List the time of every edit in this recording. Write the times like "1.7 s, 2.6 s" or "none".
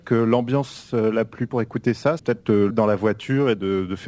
1.5 s, 2.2 s, 2.7 s